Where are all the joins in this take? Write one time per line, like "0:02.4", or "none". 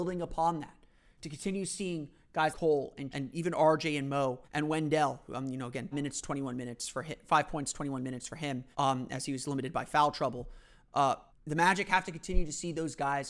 0:02.5
0:03.1
0:04.4
0:05.9
0:08.7
0:11.3